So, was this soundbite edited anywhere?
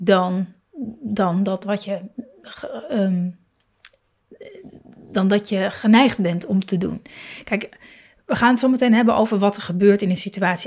no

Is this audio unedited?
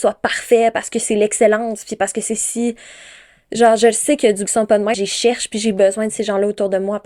no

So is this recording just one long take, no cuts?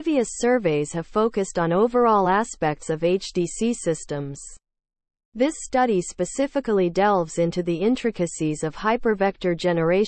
yes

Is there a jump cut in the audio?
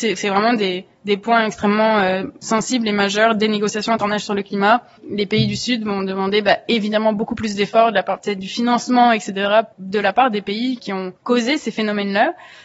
yes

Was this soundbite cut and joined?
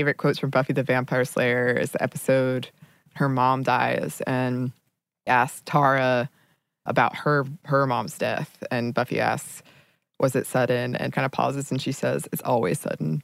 yes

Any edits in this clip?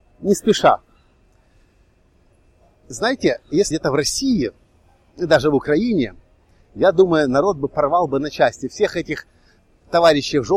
yes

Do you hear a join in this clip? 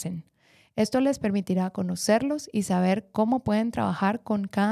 no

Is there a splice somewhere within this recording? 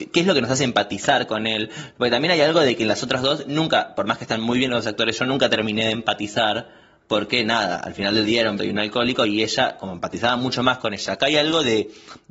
yes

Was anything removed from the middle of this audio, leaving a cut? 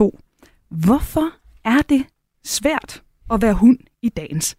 no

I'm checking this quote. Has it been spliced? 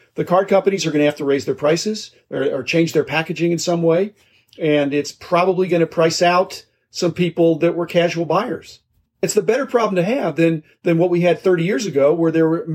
yes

